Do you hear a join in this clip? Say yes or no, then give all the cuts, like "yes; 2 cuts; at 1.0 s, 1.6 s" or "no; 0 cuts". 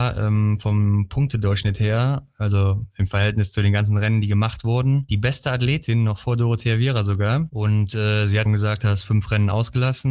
yes; 1 cut; at 8.5 s